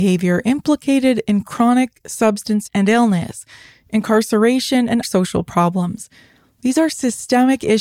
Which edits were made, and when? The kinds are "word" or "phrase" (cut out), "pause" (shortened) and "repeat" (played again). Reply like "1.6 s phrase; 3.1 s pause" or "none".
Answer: 2.7 s word; 5.0 s word